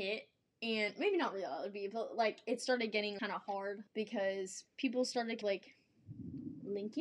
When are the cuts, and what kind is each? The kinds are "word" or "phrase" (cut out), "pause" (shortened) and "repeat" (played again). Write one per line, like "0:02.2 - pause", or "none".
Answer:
0:03.2 - word
0:03.9 - pause
0:05.4 - phrase